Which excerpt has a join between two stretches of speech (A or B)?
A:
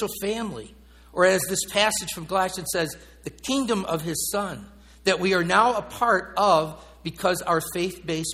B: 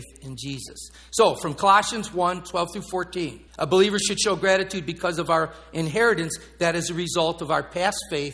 B